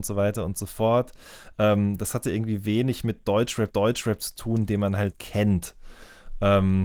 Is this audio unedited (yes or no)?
no